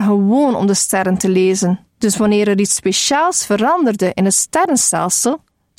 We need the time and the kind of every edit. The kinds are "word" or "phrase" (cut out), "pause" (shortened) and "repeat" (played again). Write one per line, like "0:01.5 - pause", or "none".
0:01.9 - pause